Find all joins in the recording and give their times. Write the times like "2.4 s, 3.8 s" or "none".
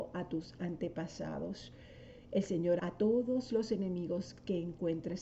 2.8 s